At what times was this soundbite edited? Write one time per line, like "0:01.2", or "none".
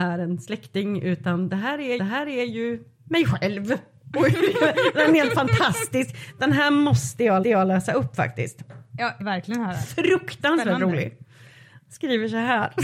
0:02.0
0:07.4
0:09.2